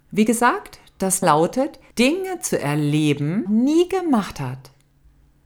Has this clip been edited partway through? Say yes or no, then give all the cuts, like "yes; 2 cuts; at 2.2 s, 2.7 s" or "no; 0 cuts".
yes; 3 cuts; at 1.2 s, 1.9 s, 3.5 s